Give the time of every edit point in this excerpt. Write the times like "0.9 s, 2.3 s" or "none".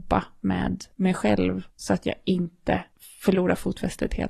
0.9 s, 1.7 s, 2.9 s